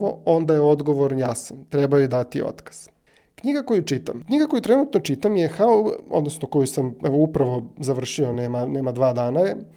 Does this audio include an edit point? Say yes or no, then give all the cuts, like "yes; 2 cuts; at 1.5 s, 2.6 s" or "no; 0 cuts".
no; 0 cuts